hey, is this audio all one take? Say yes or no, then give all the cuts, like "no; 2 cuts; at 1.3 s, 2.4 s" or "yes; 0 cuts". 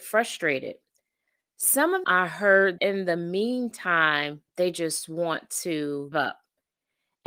no; 4 cuts; at 2.0 s, 2.8 s, 4.5 s, 6.1 s